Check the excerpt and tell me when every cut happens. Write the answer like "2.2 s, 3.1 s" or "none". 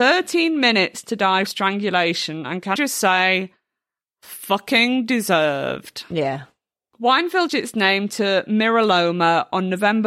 1.5 s, 2.8 s, 7.5 s